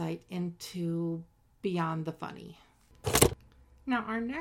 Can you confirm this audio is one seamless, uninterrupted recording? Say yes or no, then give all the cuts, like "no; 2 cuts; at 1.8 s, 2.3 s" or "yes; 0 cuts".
yes; 0 cuts